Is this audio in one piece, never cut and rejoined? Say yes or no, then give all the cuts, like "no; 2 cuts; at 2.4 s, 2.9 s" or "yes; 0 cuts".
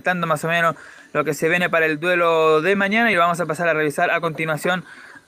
yes; 0 cuts